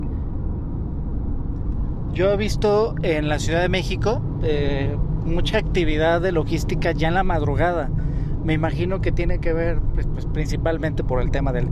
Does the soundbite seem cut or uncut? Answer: uncut